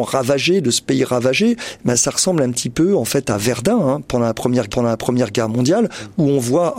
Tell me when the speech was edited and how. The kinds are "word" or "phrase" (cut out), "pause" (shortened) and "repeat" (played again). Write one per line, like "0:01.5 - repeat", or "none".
0:04.7 - repeat